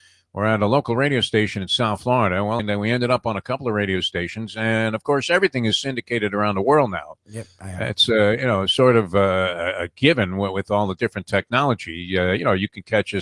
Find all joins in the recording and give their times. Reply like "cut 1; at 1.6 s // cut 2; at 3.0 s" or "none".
cut 1; at 2.6 s